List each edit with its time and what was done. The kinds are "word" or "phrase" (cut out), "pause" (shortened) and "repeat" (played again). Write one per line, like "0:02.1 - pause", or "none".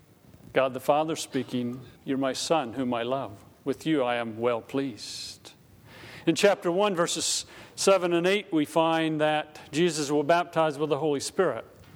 0:02.0 - pause